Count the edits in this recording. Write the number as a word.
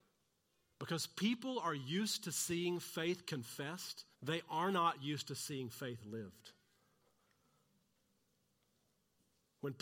one